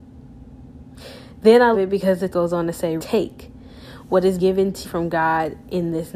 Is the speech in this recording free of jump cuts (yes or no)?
no